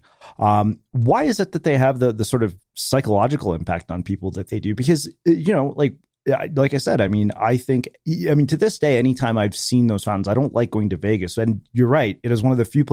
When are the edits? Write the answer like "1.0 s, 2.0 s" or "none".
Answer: none